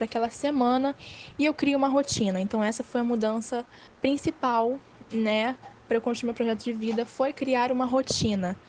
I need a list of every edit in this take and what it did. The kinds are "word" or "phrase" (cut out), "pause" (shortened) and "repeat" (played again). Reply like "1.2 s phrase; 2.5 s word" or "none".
3.9 s pause